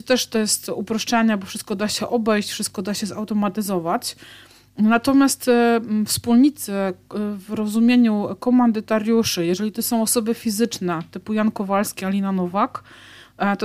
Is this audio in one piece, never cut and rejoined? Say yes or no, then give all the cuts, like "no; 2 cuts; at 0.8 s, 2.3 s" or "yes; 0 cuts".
yes; 0 cuts